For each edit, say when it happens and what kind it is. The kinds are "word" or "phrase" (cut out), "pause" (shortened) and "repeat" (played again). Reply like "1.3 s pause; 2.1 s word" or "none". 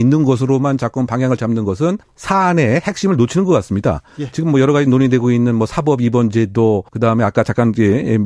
2.0 s pause; 6.9 s pause